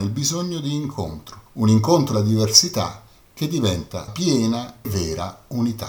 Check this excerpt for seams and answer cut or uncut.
cut